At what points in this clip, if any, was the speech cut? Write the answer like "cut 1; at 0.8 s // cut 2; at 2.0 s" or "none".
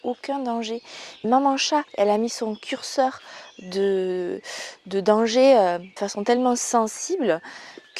cut 1; at 1.2 s // cut 2; at 1.9 s // cut 3; at 6.0 s